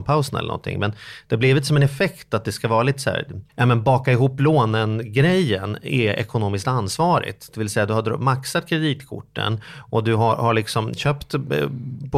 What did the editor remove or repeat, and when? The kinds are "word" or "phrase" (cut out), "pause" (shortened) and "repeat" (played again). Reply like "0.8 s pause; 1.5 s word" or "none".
3.5 s pause